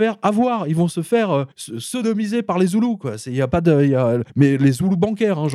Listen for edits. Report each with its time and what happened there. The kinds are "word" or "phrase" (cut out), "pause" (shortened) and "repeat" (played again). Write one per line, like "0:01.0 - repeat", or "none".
0:01.5 - pause
0:04.3 - pause